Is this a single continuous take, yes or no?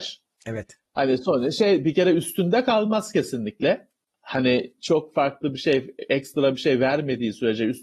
no